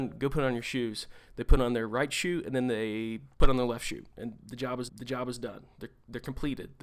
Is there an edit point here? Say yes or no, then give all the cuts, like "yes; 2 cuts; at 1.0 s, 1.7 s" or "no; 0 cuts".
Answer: yes; 2 cuts; at 3.3 s, 4.9 s